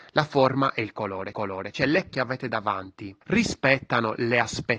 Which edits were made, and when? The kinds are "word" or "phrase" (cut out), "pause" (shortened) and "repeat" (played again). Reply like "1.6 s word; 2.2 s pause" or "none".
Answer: 1.3 s repeat; 2.1 s word; 3.2 s pause